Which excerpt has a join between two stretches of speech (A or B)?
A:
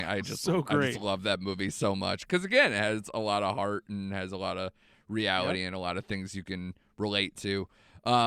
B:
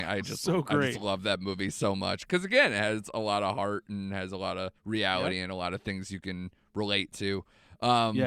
B